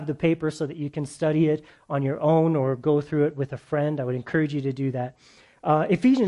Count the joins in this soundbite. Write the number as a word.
zero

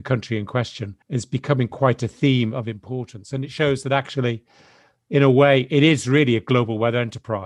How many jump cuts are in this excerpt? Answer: one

